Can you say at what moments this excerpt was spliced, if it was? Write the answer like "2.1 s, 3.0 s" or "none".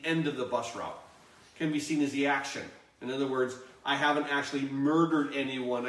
none